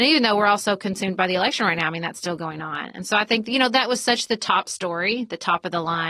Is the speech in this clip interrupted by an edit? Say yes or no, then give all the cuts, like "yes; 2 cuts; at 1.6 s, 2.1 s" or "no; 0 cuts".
no; 0 cuts